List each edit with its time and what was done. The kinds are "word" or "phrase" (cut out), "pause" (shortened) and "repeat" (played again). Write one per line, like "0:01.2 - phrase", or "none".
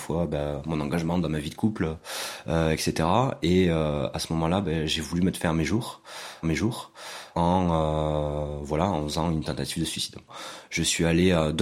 0:06.4 - repeat